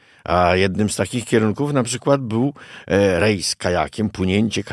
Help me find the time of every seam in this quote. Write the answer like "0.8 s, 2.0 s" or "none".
none